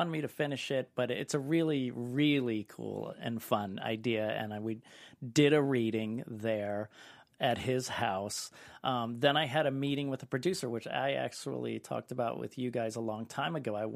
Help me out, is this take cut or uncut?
uncut